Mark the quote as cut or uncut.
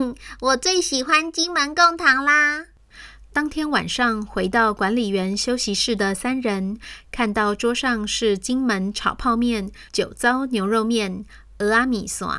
cut